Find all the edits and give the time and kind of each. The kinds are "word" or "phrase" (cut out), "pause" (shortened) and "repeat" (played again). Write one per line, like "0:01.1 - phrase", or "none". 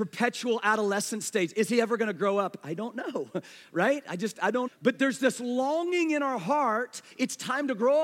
0:04.7 - word